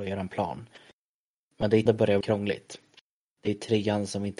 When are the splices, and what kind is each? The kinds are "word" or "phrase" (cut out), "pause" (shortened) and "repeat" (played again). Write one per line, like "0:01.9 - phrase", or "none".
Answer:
0:01.9 - word
0:02.2 - word